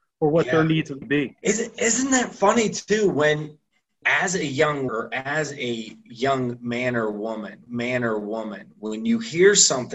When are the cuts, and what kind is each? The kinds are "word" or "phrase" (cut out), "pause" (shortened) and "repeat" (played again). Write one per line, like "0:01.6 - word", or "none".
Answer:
0:01.0 - phrase
0:01.4 - pause
0:04.0 - word
0:04.9 - word
0:07.7 - repeat